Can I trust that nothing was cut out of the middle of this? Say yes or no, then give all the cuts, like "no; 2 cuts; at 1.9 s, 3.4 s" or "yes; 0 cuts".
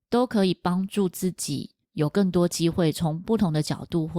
no; 1 cut; at 1.8 s